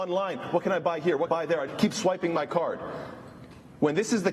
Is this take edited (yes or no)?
yes